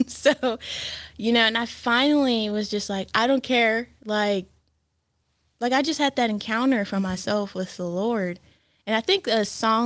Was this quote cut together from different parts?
no; 0 cuts

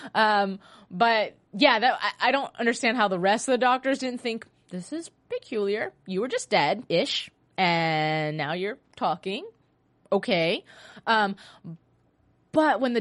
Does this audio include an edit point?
yes; 2 cuts; at 4.6 s, 6.9 s

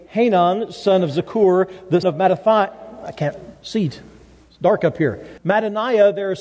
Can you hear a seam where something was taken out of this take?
yes; 2 cuts; at 2.0 s, 5.4 s

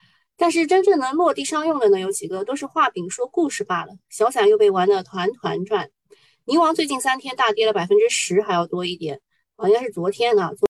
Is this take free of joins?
yes; 0 cuts

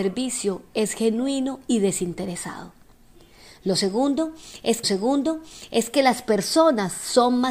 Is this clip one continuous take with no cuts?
no; 1 cut; at 4.8 s

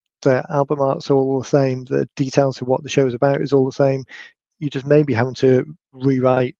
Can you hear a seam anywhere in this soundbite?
no; 0 cuts

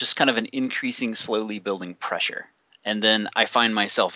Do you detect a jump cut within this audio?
yes; 1 cut; at 2.6 s

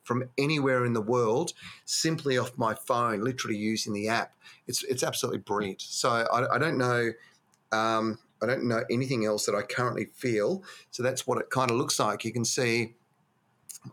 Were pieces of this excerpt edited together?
yes; 1 cut; at 8.3 s

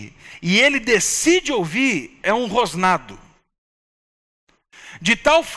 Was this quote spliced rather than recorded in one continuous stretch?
yes; 1 cut; at 2.2 s

